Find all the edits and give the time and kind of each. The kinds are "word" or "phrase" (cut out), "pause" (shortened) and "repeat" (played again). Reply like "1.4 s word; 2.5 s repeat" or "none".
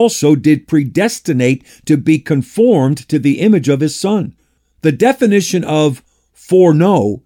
none